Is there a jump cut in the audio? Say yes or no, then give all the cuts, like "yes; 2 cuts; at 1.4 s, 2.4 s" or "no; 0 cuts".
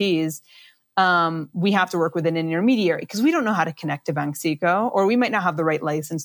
no; 0 cuts